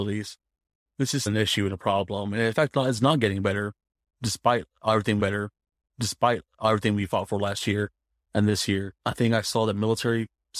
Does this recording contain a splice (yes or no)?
yes